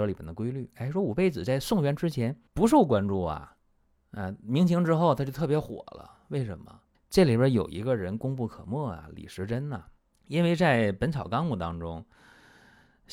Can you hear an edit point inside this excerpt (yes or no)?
yes